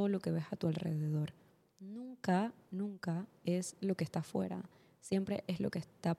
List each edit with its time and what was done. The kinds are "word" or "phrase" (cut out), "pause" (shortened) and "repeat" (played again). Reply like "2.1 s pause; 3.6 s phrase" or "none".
none